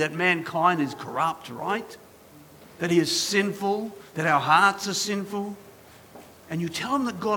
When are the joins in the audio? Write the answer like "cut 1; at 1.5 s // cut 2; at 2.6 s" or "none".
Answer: none